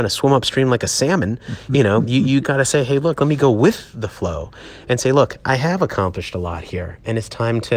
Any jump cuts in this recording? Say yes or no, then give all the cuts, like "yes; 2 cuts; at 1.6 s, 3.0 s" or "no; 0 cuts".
yes; 1 cut; at 2.4 s